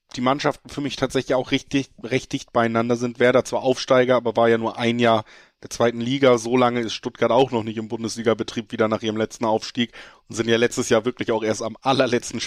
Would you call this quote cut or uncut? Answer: uncut